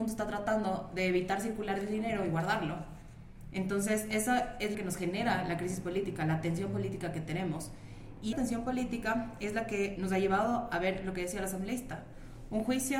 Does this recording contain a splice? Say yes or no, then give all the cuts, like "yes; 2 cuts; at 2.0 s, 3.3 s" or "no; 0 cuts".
yes; 3 cuts; at 4.7 s, 8.3 s, 10.0 s